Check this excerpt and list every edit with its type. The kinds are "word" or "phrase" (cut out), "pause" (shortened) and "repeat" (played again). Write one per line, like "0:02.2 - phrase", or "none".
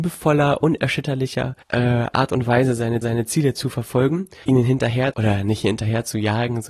0:01.6 - pause
0:03.0 - repeat
0:04.4 - word
0:05.1 - word